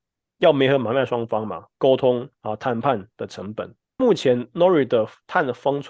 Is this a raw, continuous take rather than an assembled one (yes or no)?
no